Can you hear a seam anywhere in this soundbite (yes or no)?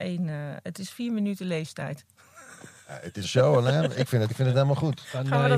yes